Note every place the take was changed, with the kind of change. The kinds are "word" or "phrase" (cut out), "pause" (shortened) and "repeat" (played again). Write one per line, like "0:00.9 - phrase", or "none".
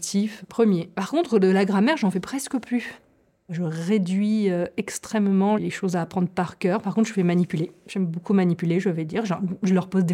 none